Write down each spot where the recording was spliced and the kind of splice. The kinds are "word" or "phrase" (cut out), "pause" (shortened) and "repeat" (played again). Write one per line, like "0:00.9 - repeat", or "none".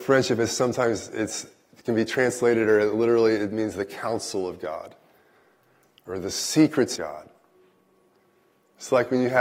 0:07.0 - word